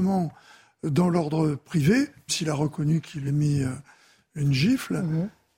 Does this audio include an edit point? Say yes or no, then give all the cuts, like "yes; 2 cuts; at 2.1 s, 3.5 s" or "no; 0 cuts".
yes; 2 cuts; at 2.3 s, 3.3 s